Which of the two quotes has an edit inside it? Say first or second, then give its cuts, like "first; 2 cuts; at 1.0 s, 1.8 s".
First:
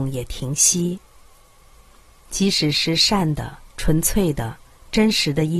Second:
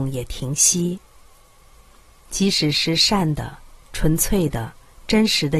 first; 1 cut; at 3.7 s